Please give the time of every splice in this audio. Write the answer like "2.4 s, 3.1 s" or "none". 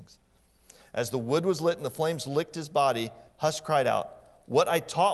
3.3 s